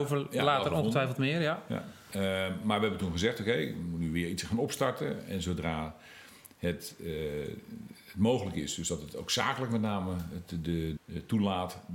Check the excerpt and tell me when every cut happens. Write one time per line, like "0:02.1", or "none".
0:11.0